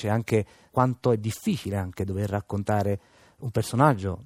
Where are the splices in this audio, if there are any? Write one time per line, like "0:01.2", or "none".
none